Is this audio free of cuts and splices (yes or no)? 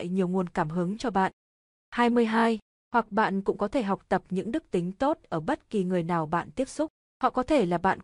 yes